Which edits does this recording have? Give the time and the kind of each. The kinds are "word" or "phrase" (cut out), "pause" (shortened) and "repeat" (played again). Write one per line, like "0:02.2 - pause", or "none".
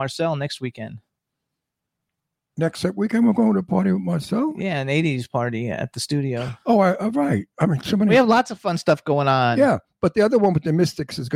none

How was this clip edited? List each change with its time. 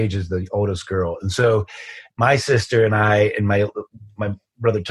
none

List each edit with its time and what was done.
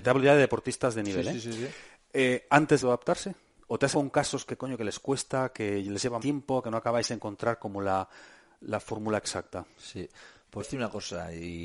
0:02.8 - phrase
0:03.9 - word
0:06.2 - word
0:10.6 - phrase

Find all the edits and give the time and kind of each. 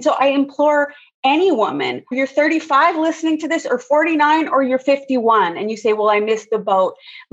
0:02.1 - word

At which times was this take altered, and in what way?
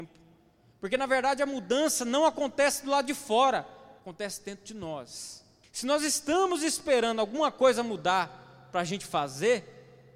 0:04.0 - pause
0:05.6 - pause

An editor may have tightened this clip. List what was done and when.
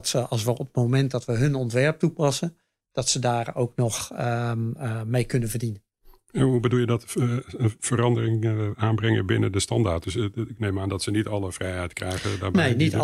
none

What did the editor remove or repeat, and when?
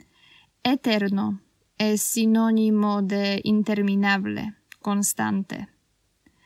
none

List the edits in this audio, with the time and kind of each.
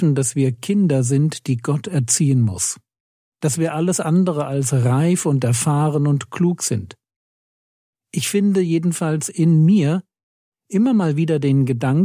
none

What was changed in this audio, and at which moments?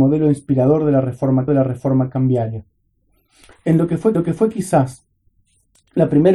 0:01.5 - repeat
0:04.1 - repeat

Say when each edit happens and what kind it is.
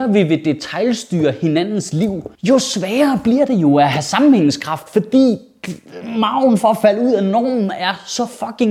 0:02.3 - pause

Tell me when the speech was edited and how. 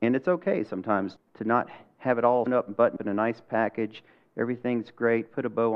0:01.2 - word
0:02.5 - word
0:03.0 - word

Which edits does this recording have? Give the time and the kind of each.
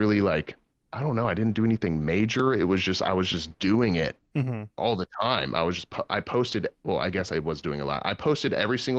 none

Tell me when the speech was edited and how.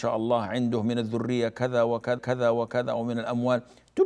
0:02.2 - repeat

